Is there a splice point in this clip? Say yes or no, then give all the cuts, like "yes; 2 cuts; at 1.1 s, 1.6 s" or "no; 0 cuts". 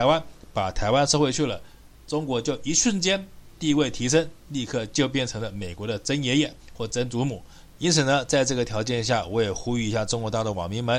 no; 0 cuts